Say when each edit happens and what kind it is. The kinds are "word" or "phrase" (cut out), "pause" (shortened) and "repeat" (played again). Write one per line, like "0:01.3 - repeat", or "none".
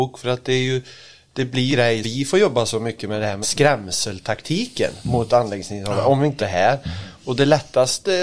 0:01.7 - word
0:02.0 - word
0:03.4 - word
0:06.4 - word

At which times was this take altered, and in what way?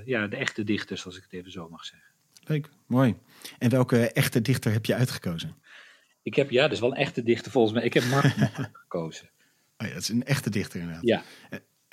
none

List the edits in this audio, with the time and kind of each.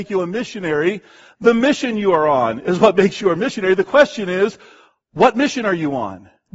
none

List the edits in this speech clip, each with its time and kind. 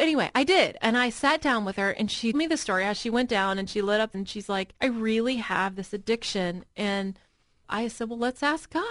0:02.3 - word
0:04.1 - word
0:04.8 - pause
0:07.6 - word

